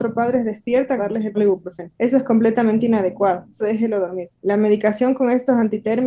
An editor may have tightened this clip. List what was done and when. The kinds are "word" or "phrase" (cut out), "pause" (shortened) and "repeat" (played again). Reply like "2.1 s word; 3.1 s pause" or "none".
1.0 s phrase; 1.3 s word; 2.0 s pause; 3.6 s phrase; 4.4 s pause